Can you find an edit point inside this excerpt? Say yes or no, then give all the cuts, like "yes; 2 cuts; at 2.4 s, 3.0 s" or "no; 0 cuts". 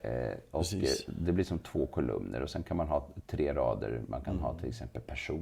no; 0 cuts